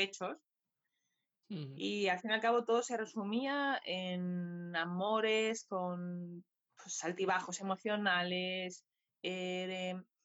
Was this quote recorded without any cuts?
yes; 0 cuts

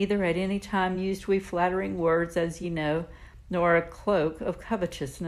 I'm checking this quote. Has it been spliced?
no; 0 cuts

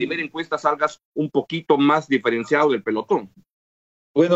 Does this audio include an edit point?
yes; 1 cut; at 1.0 s

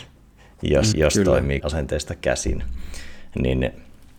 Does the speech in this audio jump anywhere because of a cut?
yes; 2 cuts; at 0.9 s, 1.6 s

